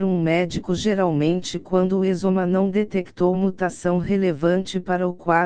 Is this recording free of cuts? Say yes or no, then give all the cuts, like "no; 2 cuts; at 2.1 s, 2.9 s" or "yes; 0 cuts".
no; 1 cut; at 3.3 s